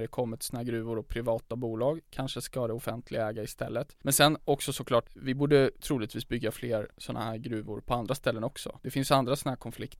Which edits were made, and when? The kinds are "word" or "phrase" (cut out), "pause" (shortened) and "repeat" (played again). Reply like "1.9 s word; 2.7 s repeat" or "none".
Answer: none